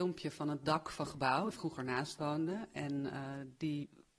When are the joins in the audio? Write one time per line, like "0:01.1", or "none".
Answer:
0:01.0
0:01.5